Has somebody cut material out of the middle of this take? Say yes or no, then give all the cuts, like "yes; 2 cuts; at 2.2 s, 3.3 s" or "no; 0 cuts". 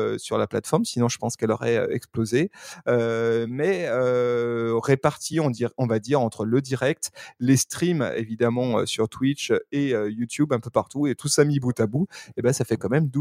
no; 0 cuts